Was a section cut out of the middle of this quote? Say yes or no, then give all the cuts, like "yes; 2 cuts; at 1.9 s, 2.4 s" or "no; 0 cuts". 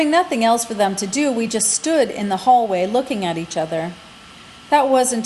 no; 0 cuts